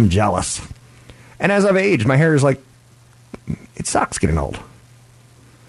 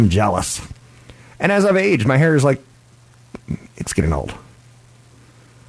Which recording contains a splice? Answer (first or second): second